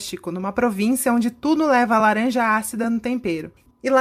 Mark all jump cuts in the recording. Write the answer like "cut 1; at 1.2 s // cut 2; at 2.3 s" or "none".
none